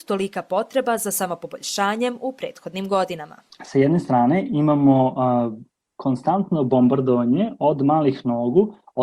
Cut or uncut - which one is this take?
uncut